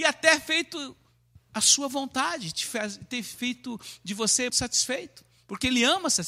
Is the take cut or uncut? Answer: cut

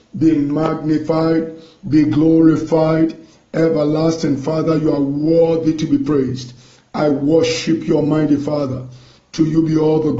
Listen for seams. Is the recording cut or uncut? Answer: uncut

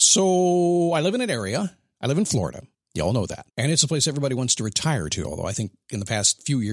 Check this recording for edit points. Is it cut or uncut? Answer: cut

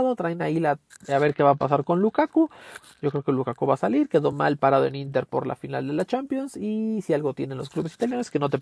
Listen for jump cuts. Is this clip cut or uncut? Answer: uncut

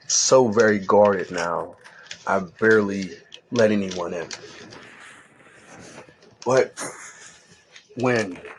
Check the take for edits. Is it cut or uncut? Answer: uncut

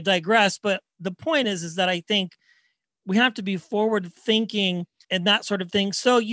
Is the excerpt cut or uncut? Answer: uncut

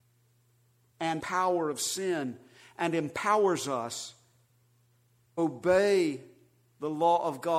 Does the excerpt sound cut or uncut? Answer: cut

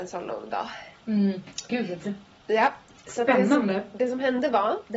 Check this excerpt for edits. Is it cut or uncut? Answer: uncut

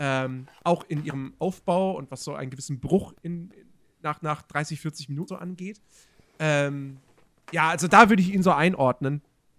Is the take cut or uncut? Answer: cut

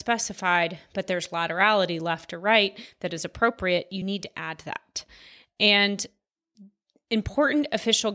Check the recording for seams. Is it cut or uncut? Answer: uncut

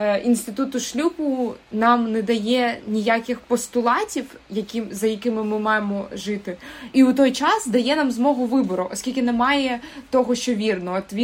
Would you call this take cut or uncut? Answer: uncut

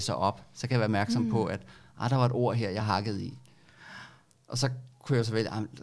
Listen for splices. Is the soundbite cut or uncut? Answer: uncut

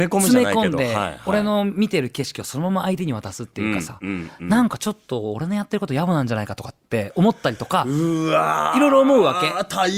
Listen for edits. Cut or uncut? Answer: uncut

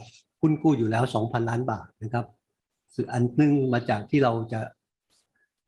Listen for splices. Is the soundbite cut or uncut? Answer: uncut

